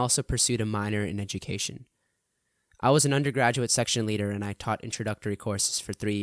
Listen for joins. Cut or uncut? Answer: uncut